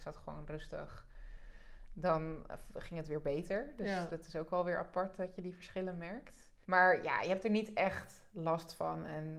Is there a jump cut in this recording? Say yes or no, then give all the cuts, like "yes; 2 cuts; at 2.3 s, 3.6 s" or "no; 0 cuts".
yes; 1 cut; at 6.6 s